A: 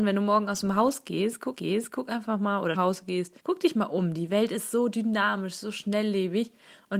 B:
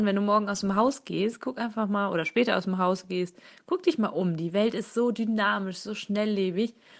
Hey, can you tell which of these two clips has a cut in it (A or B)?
A